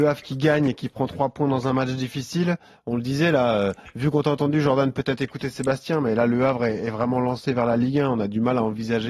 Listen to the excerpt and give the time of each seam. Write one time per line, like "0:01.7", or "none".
none